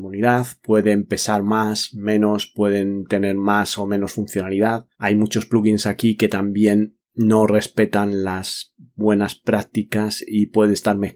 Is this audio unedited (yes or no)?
no